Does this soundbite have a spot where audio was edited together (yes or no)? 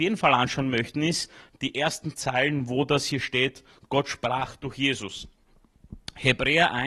no